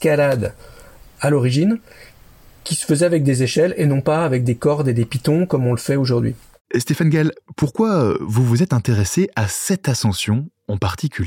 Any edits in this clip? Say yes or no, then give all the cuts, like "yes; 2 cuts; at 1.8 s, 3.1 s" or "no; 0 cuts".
no; 0 cuts